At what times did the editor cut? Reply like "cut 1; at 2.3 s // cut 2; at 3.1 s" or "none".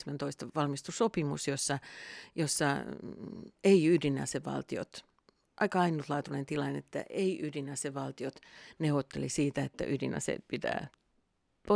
none